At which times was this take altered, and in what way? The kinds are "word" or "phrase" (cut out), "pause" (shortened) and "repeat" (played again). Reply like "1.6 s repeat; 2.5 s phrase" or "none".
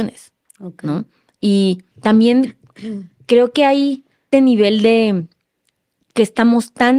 1.9 s pause; 3.1 s pause; 4.3 s word